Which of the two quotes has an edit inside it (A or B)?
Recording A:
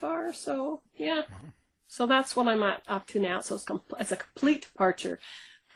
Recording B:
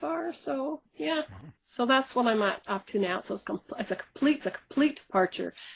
B